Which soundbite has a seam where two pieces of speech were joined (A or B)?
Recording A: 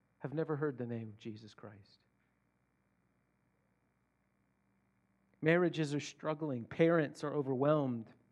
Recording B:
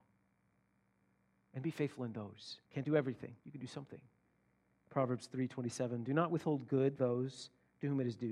B